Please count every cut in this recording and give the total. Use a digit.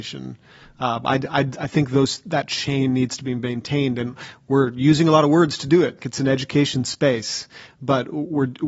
1